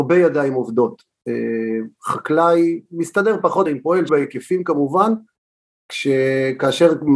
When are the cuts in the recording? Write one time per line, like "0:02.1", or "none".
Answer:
0:02.8
0:03.7
0:04.1